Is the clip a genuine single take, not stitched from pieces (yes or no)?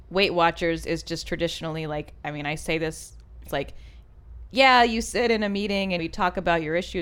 no